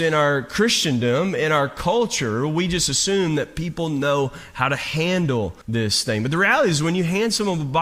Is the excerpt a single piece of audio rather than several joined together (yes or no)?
no